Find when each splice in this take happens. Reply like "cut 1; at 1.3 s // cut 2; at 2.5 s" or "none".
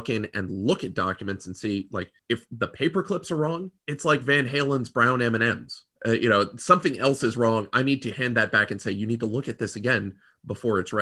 cut 1; at 2.2 s // cut 2; at 3.8 s // cut 3; at 5.9 s